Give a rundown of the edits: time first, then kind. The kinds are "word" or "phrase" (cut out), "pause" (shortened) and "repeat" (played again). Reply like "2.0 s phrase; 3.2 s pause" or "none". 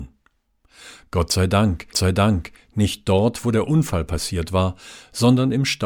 1.9 s repeat

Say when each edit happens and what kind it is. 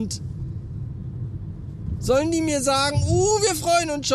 none

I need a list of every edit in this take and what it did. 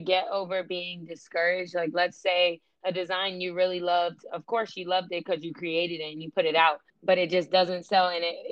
6.9 s pause

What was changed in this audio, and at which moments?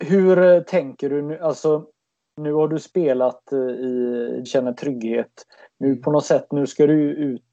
4.5 s phrase

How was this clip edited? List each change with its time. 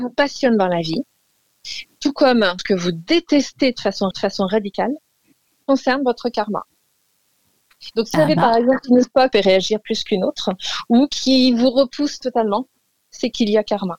2.6 s word; 4.1 s repeat; 8.1 s word; 9.3 s phrase; 12.2 s word

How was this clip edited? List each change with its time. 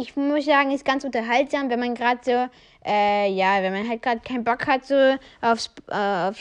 none

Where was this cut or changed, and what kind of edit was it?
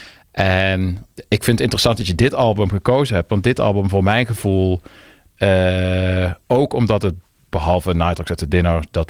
none

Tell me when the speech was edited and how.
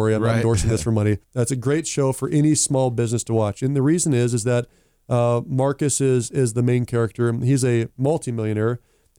1.2 s pause

